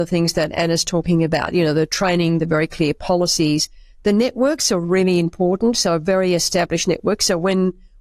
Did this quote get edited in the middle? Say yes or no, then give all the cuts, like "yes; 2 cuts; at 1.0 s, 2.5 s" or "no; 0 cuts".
no; 0 cuts